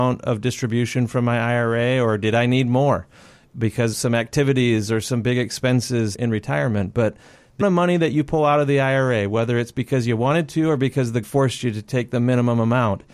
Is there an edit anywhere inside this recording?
yes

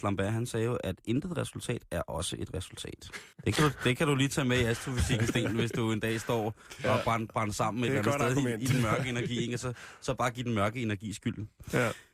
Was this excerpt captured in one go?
no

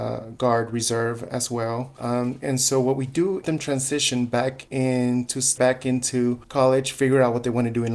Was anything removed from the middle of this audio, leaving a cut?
yes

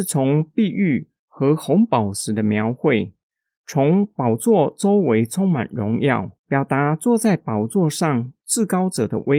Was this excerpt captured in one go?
no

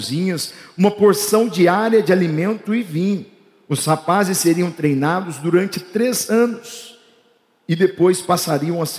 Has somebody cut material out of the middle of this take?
no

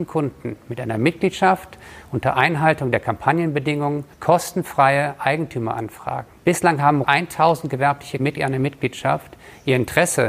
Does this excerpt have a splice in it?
yes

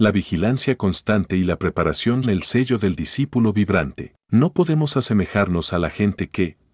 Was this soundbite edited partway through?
yes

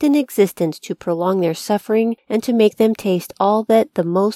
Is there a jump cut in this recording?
no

